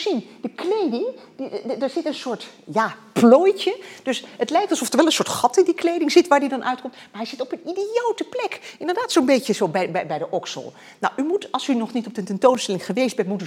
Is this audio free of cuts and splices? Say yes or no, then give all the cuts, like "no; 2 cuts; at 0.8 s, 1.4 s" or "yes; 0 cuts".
yes; 0 cuts